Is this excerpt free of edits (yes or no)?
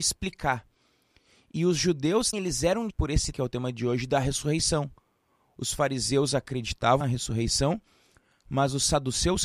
no